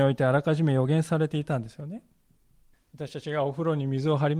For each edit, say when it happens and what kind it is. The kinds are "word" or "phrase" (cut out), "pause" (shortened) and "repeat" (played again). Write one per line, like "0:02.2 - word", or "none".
0:02.7 - pause